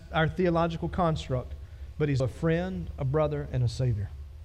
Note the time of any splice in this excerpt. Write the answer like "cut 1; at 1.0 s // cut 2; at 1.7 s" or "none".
cut 1; at 2.2 s